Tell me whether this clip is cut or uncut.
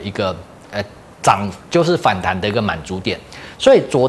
uncut